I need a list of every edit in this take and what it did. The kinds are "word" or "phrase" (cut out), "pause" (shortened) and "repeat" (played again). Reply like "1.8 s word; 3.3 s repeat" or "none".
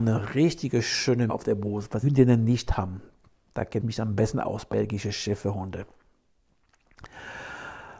1.3 s word; 2.0 s word; 3.8 s word; 4.7 s word